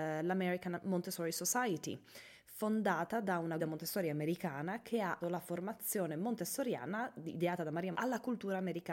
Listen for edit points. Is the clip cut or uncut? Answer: cut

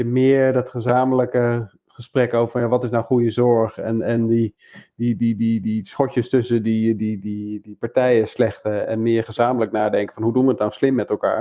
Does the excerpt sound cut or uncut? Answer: cut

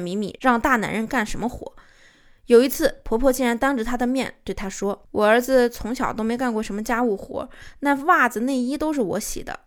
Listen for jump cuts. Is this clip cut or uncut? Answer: uncut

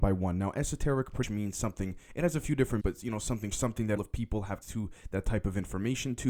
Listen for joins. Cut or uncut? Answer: cut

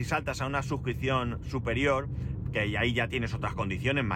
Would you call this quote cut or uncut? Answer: uncut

